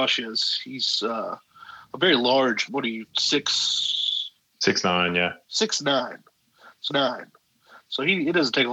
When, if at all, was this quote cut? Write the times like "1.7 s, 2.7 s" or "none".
2.7 s, 4.4 s, 6.9 s